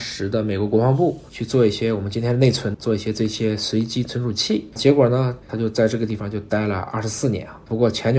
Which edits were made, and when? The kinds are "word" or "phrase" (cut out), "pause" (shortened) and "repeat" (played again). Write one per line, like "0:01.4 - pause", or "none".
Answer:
0:02.7 - word